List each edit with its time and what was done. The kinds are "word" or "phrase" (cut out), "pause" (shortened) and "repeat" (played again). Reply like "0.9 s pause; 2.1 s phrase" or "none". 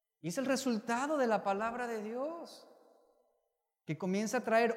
none